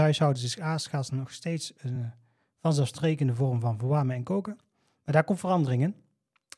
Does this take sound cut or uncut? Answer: uncut